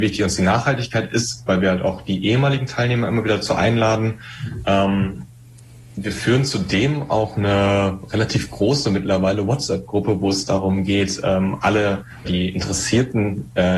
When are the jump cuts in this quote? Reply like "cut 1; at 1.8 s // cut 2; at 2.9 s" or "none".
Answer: cut 1; at 12.2 s